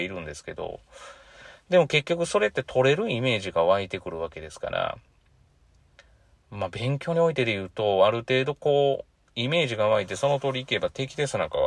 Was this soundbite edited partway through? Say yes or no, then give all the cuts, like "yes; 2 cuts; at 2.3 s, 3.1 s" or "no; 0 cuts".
no; 0 cuts